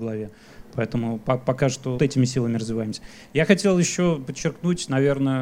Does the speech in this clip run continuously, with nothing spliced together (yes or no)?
no